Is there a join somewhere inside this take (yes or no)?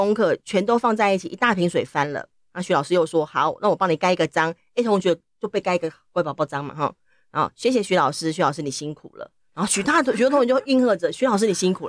no